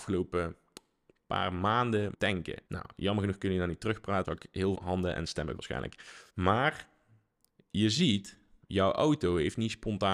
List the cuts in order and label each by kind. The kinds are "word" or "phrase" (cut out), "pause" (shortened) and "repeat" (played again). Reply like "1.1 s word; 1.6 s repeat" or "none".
2.1 s word; 2.7 s pause; 4.2 s word; 4.7 s word; 5.6 s word; 6.3 s pause